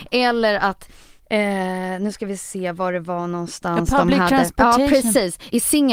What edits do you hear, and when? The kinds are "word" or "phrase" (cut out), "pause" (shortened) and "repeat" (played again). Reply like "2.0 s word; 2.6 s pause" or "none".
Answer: none